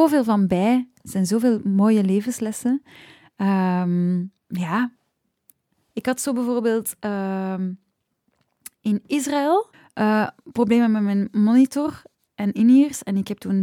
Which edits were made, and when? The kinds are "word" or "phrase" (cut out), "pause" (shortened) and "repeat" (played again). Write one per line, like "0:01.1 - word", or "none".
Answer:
0:04.4 - pause
0:09.7 - pause